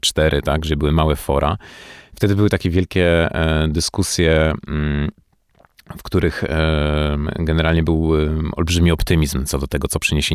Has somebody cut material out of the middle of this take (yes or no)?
no